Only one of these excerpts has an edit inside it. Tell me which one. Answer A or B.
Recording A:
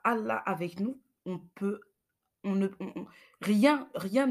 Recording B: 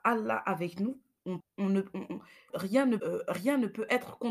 B